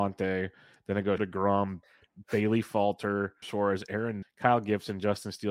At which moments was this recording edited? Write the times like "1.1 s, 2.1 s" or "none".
1.2 s, 1.8 s, 3.4 s, 4.2 s